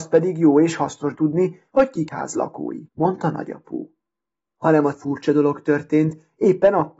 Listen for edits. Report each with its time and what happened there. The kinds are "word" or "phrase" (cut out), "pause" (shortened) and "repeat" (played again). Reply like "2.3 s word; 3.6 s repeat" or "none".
1.1 s word; 2.1 s word; 2.9 s pause; 4.9 s word